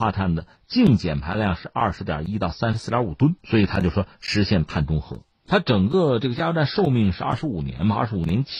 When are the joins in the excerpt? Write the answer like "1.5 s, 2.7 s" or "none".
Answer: 3.4 s, 5.3 s